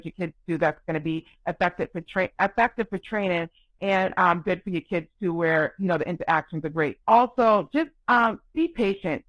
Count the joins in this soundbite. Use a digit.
1